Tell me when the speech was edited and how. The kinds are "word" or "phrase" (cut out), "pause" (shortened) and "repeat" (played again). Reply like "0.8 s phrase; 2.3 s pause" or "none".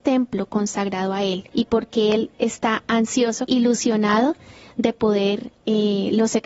1.5 s pause; 2.3 s pause; 3.5 s phrase; 5.5 s word